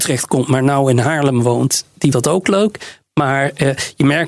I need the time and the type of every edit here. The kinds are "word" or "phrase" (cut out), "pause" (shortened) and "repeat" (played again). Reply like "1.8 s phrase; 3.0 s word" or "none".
2.1 s word